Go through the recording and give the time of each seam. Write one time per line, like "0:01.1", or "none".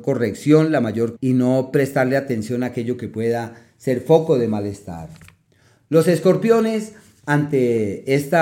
0:01.2